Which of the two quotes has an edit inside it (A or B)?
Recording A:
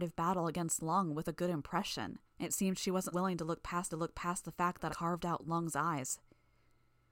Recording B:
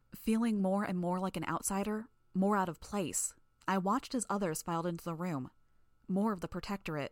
A